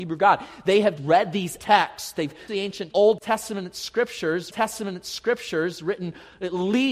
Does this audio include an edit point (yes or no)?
yes